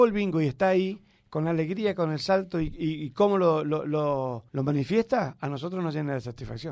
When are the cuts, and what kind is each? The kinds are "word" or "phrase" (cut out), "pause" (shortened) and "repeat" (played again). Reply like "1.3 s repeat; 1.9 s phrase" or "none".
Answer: 4.5 s pause